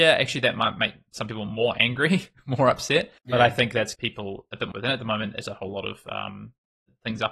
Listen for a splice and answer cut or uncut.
cut